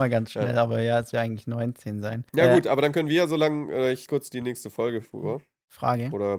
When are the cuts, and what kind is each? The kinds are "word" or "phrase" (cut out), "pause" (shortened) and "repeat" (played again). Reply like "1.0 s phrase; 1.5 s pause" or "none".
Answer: 1.1 s word; 2.3 s pause; 4.1 s word

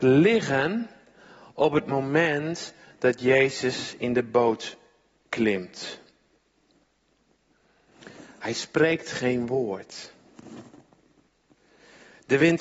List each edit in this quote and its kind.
none

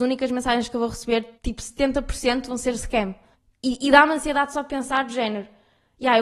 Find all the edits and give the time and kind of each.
1.3 s pause; 3.3 s pause

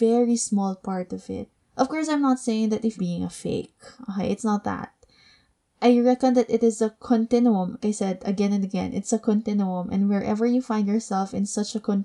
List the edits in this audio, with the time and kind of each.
1.6 s pause; 3.0 s phrase; 7.8 s word

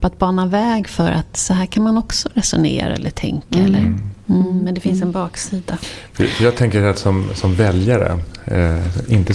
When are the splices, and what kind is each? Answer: none

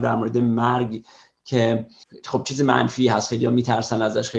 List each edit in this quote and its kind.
none

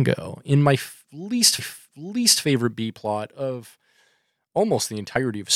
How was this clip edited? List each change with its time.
1.6 s repeat

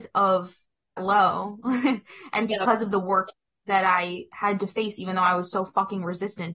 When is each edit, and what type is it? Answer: 1.0 s word

